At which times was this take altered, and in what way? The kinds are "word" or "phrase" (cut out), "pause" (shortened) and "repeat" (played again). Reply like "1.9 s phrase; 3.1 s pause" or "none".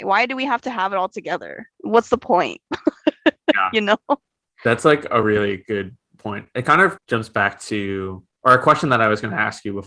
none